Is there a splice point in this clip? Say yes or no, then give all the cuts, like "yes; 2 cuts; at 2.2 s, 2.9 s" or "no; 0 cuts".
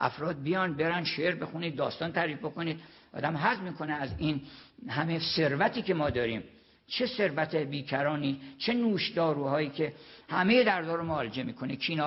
no; 0 cuts